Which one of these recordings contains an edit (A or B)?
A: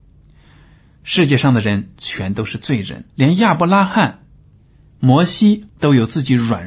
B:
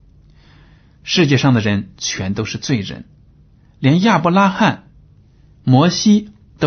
A